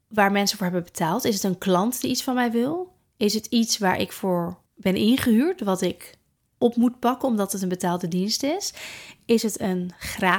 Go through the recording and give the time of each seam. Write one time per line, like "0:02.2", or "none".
0:04.7
0:06.4